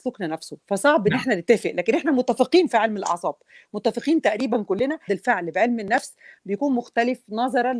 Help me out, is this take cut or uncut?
cut